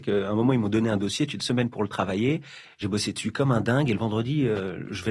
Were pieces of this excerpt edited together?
yes; 1 cut; at 1.4 s

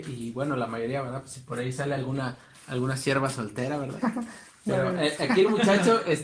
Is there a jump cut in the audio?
no; 0 cuts

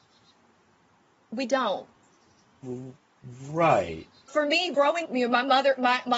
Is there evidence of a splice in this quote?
yes; 3 cuts; at 4.3 s, 4.7 s, 5.0 s

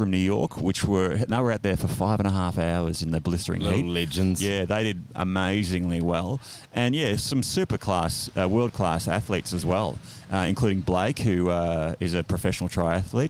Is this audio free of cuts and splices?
yes; 0 cuts

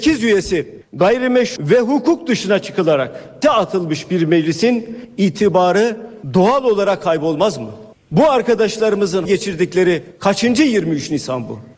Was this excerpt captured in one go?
no; 3 cuts; at 1.6 s, 3.4 s, 9.3 s

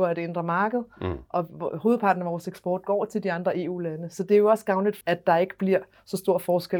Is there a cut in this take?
yes; 1 cut; at 5.0 s

